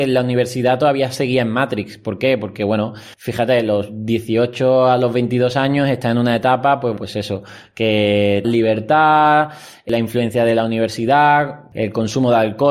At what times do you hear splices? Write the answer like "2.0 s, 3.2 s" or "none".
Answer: 3.1 s, 7.0 s, 8.4 s